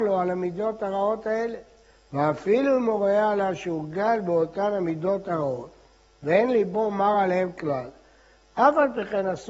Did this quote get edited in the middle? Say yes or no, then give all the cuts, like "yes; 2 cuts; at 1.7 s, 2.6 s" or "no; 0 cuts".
no; 0 cuts